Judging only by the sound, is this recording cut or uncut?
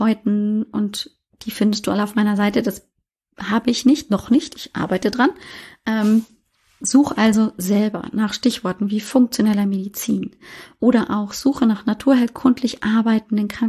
uncut